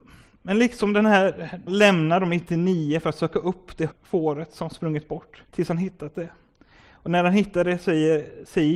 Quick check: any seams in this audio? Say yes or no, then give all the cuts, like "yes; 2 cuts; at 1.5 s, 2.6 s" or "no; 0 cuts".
yes; 3 cuts; at 1.7 s, 3.9 s, 5.5 s